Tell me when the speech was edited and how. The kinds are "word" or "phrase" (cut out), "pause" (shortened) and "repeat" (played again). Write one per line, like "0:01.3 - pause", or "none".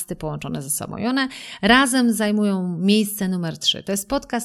none